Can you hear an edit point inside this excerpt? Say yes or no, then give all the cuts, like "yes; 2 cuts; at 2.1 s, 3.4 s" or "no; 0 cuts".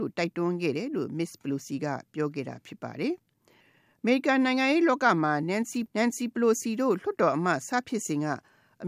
no; 0 cuts